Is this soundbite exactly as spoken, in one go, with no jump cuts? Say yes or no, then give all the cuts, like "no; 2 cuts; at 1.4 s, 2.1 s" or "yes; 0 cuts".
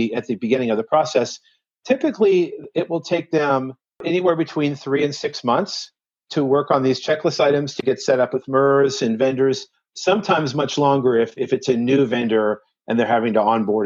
yes; 0 cuts